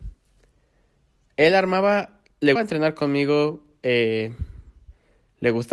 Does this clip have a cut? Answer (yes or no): yes